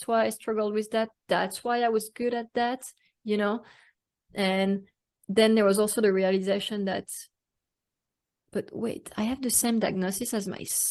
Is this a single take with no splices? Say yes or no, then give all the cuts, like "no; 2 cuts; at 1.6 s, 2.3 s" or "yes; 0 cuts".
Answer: yes; 0 cuts